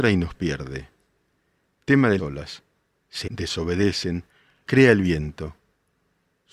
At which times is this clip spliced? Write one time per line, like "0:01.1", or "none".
0:02.2
0:03.3
0:04.7

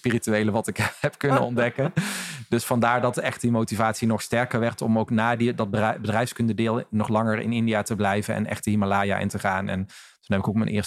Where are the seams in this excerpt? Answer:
none

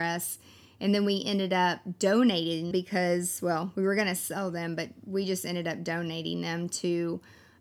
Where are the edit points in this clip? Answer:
0:02.7

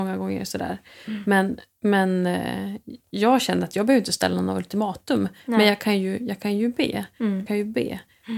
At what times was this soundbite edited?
0:07.5

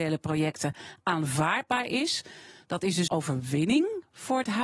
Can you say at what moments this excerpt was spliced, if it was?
0:03.1

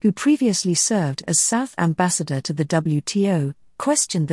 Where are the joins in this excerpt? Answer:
0:01.8

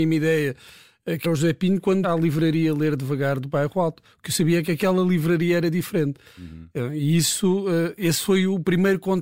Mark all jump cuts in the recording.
0:01.2
0:02.0

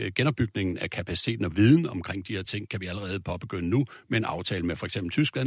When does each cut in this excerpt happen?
none

